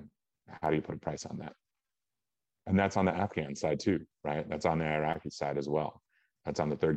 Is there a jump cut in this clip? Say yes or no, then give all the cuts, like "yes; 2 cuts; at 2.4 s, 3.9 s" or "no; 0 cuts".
no; 0 cuts